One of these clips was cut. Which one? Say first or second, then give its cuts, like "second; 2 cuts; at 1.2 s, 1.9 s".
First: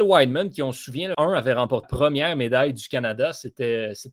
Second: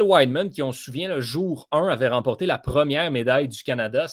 first; 2 cuts; at 1.1 s, 1.8 s